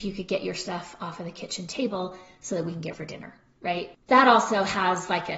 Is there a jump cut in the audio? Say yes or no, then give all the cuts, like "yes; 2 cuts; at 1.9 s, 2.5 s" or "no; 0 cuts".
yes; 1 cut; at 2.9 s